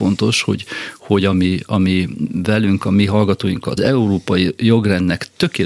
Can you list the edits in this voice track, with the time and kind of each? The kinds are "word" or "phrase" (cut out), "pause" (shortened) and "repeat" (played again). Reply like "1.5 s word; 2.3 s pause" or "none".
3.8 s phrase

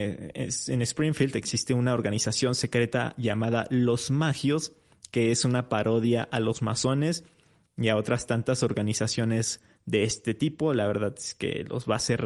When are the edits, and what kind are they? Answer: none

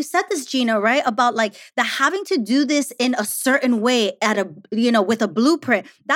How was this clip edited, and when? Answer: none

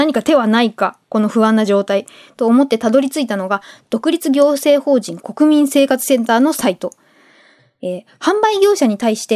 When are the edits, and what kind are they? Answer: none

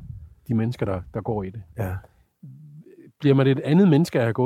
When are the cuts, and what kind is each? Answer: none

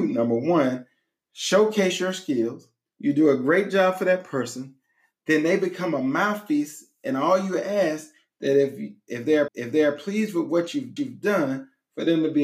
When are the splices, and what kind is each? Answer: 2.9 s pause; 9.5 s repeat; 11.0 s repeat

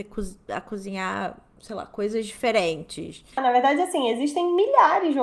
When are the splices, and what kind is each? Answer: 3.3 s pause

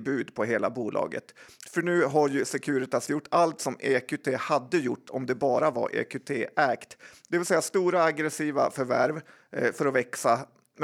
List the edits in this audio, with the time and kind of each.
none

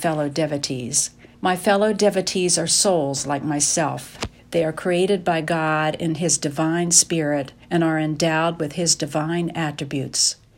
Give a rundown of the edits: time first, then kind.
1.3 s pause; 4.4 s pause; 7.6 s pause

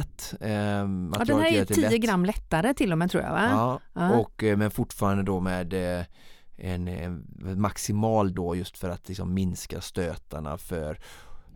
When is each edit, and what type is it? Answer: 8.4 s word

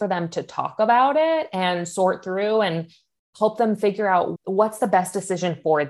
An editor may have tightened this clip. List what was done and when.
4.4 s word

